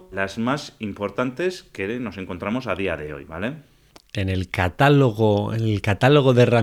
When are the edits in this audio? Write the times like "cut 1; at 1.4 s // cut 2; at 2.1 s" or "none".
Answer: cut 1; at 3.9 s